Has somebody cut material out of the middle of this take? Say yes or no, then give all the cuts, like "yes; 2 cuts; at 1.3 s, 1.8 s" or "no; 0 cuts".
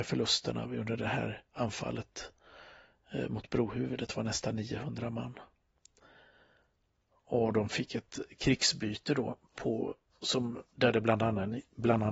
yes; 2 cuts; at 1.5 s, 10.7 s